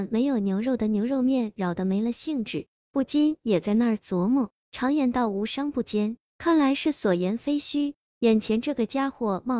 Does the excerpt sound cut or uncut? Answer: uncut